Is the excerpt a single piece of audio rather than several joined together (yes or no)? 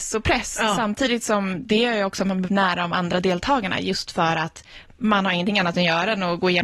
no